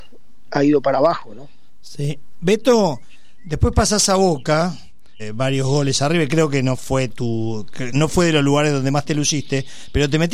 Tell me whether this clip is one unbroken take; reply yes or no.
no